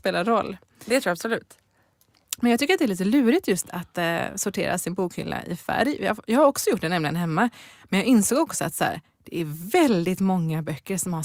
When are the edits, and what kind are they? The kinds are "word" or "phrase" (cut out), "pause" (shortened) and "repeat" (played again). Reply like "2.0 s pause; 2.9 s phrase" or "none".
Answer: none